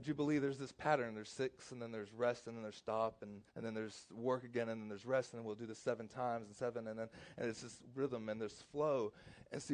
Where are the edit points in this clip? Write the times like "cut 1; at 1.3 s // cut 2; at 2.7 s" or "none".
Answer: cut 1; at 3.5 s